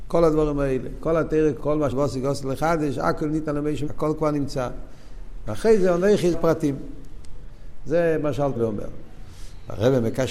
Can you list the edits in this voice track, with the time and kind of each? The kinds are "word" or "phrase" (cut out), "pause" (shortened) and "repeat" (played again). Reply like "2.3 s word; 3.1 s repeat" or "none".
1.6 s word; 1.9 s word; 3.9 s word; 6.3 s word; 8.6 s word